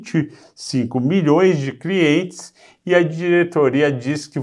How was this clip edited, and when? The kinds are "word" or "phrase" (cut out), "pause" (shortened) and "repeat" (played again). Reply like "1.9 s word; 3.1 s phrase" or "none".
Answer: none